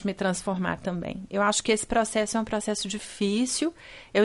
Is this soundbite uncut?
yes; 0 cuts

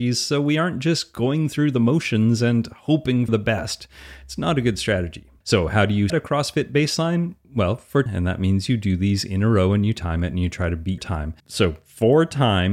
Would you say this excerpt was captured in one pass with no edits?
no; 6 cuts; at 3.3 s, 5.4 s, 6.1 s, 8.1 s, 11.0 s, 11.4 s

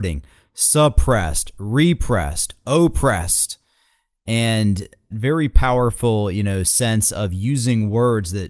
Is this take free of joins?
no; 1 cut; at 5.1 s

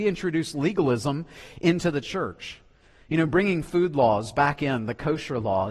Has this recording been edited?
no; 0 cuts

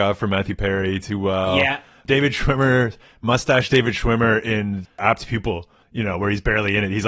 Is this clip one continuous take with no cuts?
yes; 0 cuts

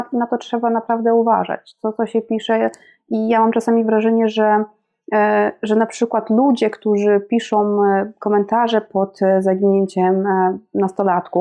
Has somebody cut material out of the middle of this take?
no; 0 cuts

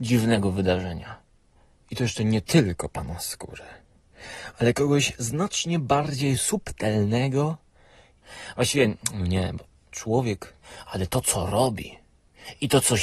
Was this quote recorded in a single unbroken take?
yes; 0 cuts

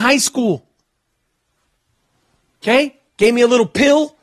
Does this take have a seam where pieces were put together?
yes; 1 cut; at 3.1 s

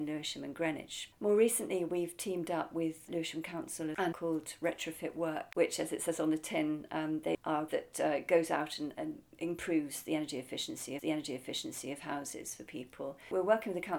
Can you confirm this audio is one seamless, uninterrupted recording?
no; 5 cuts; at 3.1 s, 4.1 s, 7.7 s, 8.9 s, 11.0 s

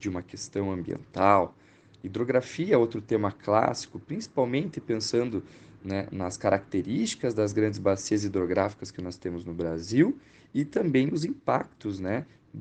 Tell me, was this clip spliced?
no; 0 cuts

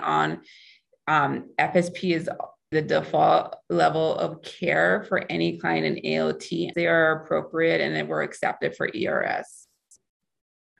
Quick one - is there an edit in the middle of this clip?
yes; 2 cuts; at 2.7 s, 6.7 s

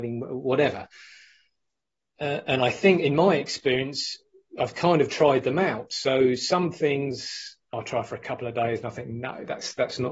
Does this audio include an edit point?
no; 0 cuts

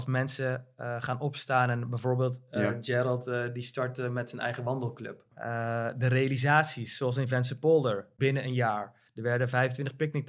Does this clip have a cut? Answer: no; 0 cuts

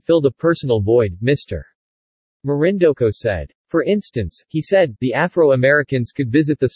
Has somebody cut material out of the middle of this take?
no; 0 cuts

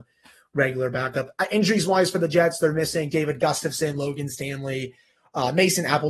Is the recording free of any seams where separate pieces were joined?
yes; 0 cuts

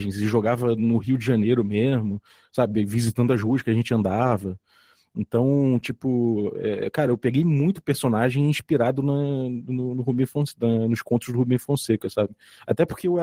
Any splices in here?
no; 0 cuts

